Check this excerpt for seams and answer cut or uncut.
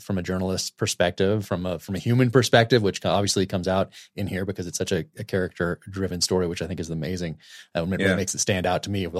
uncut